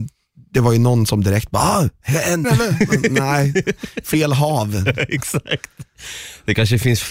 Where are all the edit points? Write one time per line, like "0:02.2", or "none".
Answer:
0:02.4